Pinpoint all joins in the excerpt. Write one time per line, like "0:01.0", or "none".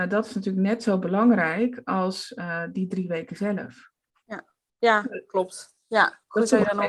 none